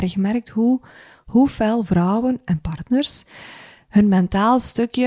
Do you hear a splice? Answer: no; 0 cuts

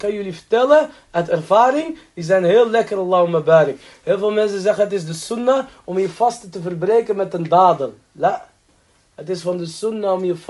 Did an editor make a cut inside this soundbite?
no; 0 cuts

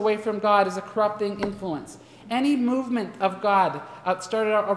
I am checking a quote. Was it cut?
no; 0 cuts

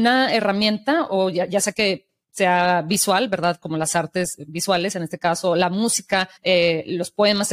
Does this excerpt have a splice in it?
yes; 1 cut; at 6.4 s

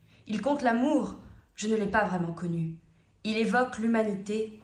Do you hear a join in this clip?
no; 0 cuts

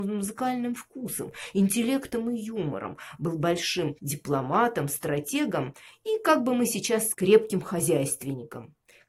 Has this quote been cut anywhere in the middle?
yes; 2 cuts; at 4.0 s, 7.1 s

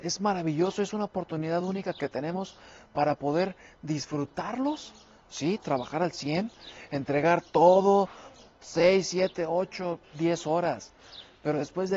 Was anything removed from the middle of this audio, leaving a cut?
no; 0 cuts

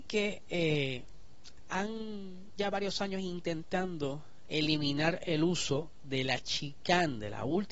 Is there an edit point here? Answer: yes; 1 cut; at 2.6 s

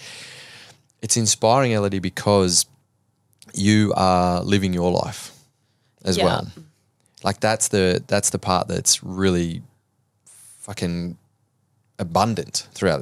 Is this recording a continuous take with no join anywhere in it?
yes; 0 cuts

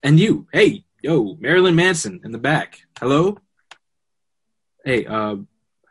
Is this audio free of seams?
yes; 0 cuts

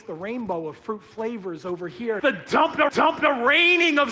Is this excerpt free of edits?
no; 2 cuts; at 2.2 s, 2.9 s

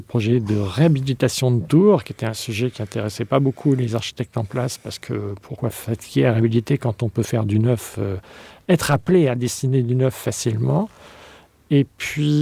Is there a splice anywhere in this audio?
no; 0 cuts

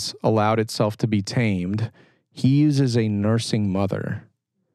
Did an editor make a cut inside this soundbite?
no; 0 cuts

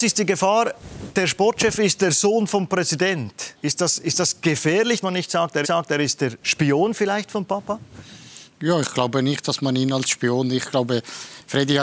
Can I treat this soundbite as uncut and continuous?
no; 3 cuts; at 3.5 s, 5.0 s, 5.6 s

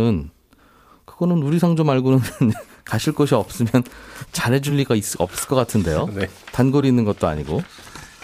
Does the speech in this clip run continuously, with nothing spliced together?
yes; 0 cuts

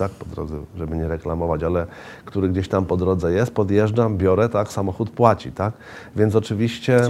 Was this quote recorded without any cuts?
yes; 0 cuts

